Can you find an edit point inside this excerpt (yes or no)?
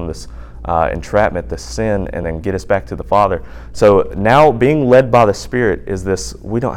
no